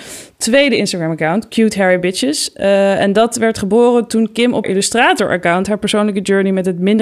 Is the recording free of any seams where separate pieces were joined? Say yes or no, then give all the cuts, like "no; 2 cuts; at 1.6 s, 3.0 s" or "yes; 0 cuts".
no; 1 cut; at 4.6 s